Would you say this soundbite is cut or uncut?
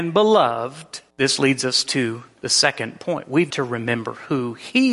cut